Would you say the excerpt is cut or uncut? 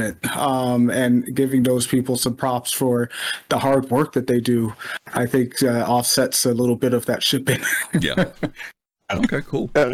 uncut